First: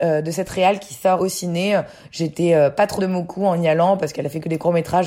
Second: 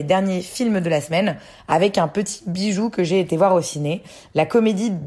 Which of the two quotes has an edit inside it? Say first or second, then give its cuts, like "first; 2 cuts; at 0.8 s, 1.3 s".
first; 2 cuts; at 1.2 s, 3.0 s